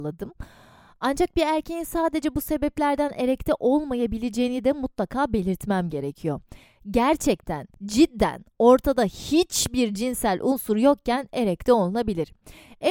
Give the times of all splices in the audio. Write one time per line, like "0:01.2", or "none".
0:07.7